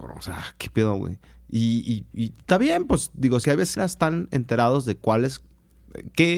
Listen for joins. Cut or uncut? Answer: cut